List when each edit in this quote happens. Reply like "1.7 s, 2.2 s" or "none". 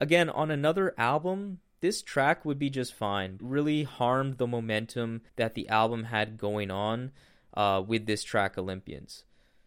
3.4 s, 5.3 s